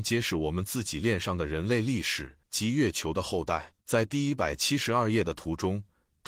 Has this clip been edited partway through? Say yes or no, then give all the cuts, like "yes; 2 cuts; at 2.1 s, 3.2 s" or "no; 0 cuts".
yes; 2 cuts; at 2.4 s, 3.8 s